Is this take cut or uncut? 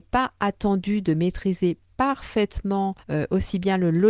cut